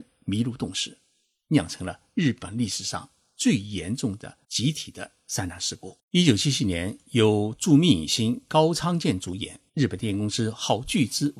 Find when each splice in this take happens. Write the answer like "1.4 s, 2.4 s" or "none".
4.4 s, 6.0 s, 9.7 s